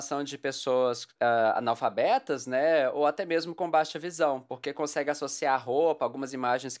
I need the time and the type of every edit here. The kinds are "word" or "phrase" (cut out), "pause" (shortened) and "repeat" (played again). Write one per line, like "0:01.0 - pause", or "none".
none